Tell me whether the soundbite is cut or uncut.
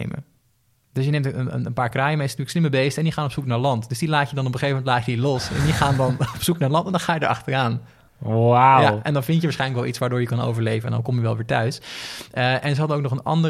uncut